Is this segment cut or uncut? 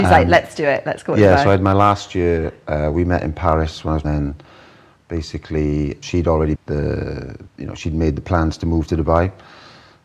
cut